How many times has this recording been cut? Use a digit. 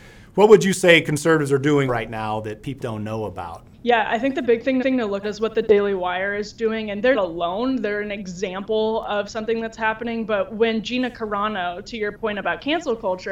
6